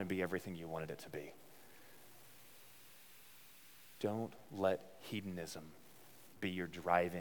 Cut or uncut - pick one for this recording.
uncut